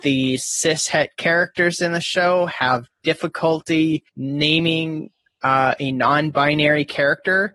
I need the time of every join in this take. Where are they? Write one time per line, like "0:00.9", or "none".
0:04.1

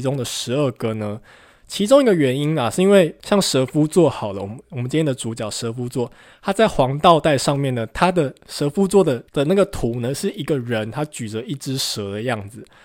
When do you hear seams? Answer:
none

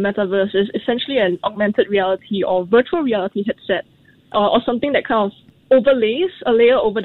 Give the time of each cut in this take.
none

